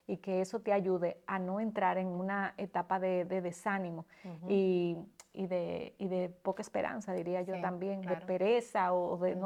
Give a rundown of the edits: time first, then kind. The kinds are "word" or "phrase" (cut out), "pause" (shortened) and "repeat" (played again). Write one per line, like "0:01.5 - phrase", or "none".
none